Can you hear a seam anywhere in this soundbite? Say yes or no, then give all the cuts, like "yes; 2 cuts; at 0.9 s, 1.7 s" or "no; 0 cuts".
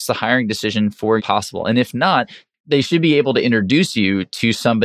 yes; 1 cut; at 1.2 s